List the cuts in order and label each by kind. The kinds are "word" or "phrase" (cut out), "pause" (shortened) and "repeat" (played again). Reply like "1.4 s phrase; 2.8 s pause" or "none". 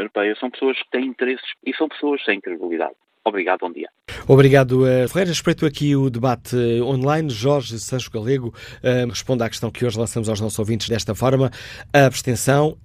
1.6 s word; 3.6 s word; 5.1 s word; 9.1 s word; 10.9 s word